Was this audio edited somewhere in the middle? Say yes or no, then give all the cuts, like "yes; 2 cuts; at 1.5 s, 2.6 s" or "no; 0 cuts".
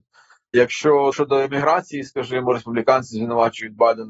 yes; 1 cut; at 1.1 s